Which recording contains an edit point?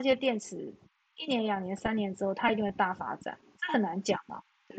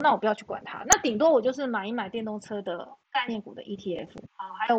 second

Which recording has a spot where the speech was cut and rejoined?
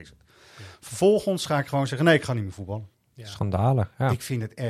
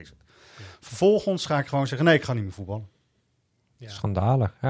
first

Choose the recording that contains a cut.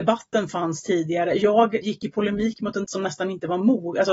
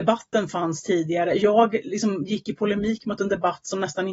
first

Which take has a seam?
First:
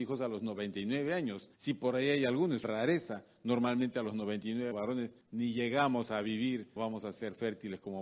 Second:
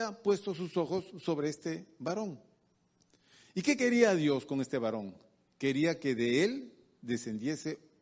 first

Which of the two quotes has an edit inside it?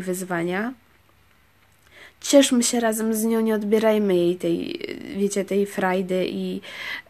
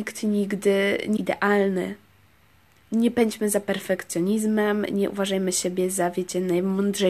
second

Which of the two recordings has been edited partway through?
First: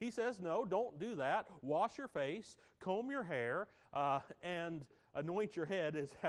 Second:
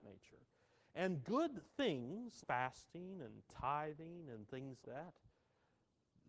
second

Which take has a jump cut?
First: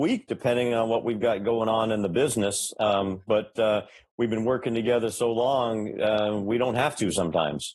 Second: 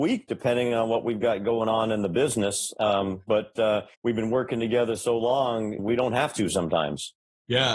second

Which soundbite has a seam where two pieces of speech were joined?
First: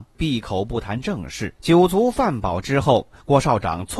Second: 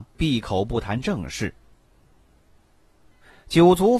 first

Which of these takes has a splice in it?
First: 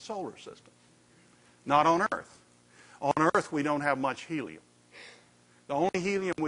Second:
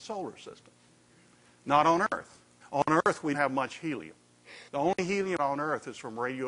second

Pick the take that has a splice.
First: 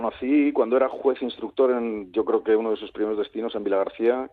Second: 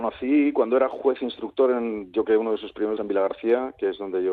second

